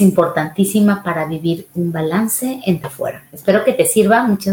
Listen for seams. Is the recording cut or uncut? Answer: cut